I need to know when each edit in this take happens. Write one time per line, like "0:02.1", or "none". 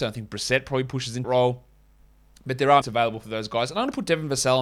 0:01.2
0:02.8
0:03.2